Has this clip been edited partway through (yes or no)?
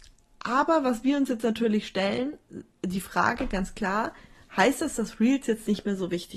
no